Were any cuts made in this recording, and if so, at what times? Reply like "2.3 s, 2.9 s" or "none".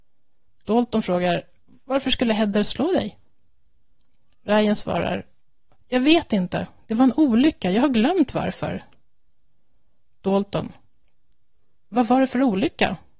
none